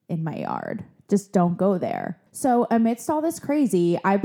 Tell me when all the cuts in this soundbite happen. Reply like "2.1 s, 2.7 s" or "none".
2.3 s